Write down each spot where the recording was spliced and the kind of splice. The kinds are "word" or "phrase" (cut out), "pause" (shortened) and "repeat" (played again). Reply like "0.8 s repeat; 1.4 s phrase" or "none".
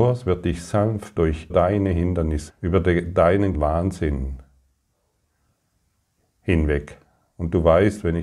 1.2 s word; 1.5 s word; 2.5 s word; 3.5 s word